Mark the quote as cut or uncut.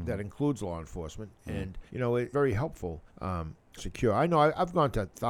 cut